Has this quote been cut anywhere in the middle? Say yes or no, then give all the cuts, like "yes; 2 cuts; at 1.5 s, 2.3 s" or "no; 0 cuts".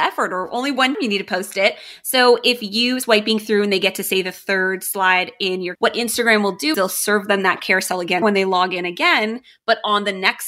yes; 5 cuts; at 0.9 s, 3.0 s, 5.7 s, 6.7 s, 8.2 s